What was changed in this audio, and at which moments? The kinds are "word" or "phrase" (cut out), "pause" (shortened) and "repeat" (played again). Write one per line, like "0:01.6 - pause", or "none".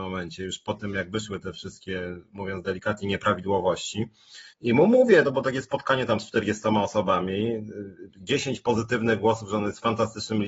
0:02.2 - pause
0:04.5 - pause
0:05.2 - phrase